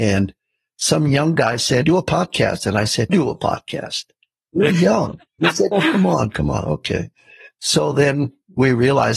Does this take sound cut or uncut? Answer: cut